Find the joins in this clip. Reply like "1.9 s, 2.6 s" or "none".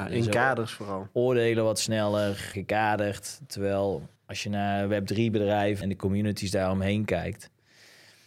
2.5 s, 4.2 s, 5.8 s